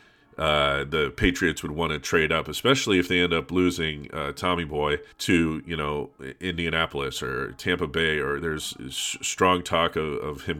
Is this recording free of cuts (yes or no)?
no